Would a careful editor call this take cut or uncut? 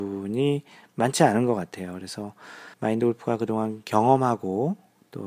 cut